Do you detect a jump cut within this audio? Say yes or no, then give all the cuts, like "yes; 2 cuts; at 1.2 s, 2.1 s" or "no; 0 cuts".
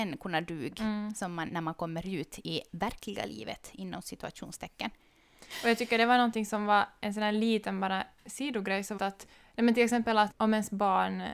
yes; 5 cuts; at 1.5 s, 2.7 s, 9.0 s, 9.3 s, 10.3 s